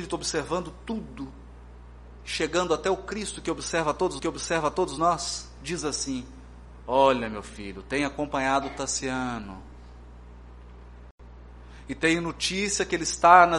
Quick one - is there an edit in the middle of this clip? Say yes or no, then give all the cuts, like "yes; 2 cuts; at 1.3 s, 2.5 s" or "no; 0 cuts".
yes; 2 cuts; at 2.2 s, 4.2 s